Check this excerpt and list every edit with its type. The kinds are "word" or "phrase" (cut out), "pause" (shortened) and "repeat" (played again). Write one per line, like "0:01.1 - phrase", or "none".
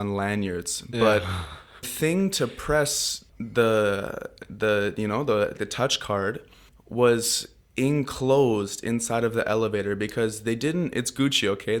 0:01.8 - word
0:03.3 - pause
0:05.6 - word
0:06.7 - pause